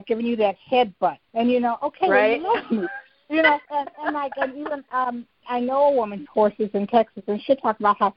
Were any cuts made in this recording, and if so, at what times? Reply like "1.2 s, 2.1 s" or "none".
1.2 s, 3.6 s, 5.4 s, 6.2 s